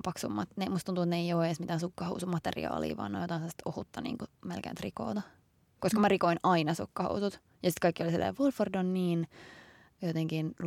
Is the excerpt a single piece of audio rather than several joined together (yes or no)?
yes